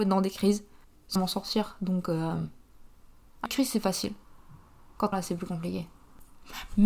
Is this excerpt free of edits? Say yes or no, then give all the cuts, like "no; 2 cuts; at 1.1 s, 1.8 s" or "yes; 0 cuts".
no; 3 cuts; at 1.2 s, 3.5 s, 5.1 s